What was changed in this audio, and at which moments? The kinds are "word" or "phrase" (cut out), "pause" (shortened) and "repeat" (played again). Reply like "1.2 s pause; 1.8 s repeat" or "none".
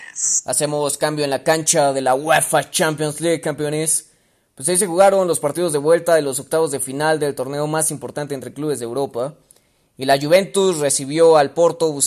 none